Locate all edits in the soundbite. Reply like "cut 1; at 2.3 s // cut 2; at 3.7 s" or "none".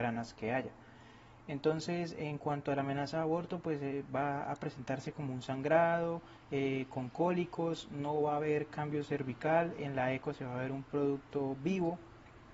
none